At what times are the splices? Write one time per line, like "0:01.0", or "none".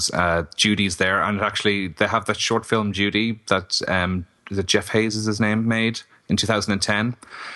none